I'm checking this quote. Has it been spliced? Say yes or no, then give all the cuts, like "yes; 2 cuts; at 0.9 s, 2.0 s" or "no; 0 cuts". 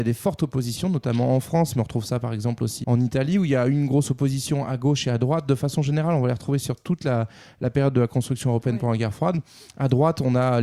yes; 1 cut; at 2.8 s